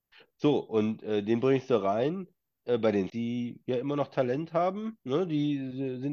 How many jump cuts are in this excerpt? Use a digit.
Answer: 1